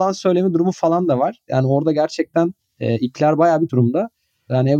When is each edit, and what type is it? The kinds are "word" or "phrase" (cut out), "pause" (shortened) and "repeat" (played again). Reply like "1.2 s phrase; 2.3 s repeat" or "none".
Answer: 3.7 s word